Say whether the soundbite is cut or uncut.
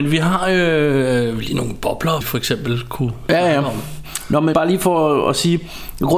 cut